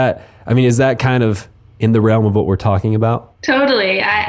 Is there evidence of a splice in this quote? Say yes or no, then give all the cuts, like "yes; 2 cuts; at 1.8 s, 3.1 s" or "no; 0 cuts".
no; 0 cuts